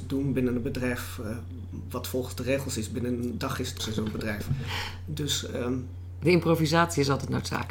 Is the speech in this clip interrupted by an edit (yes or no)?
yes